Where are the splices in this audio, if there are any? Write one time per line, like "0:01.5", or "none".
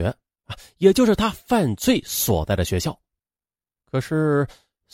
none